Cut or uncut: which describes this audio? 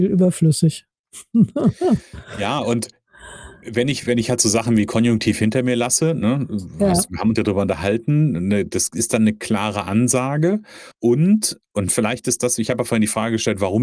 cut